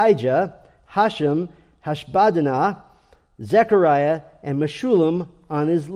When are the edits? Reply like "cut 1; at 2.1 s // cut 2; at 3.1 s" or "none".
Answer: none